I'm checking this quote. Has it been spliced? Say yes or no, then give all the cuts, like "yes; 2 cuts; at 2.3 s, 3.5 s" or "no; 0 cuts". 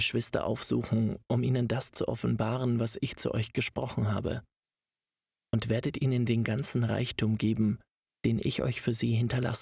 no; 0 cuts